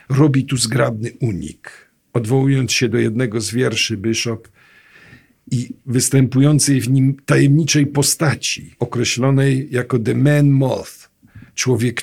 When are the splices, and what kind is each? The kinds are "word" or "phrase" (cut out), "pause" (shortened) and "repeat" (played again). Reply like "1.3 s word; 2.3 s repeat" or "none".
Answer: 8.7 s pause